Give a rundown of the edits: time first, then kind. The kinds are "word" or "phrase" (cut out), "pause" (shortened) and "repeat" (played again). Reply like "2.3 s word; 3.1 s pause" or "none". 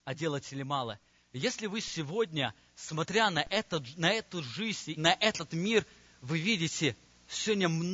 5.0 s word